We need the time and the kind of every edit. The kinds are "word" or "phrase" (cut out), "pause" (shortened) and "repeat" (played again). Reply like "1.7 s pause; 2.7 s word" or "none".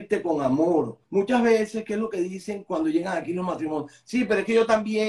1.0 s pause